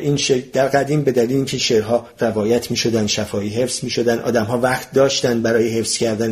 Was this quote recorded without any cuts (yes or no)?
yes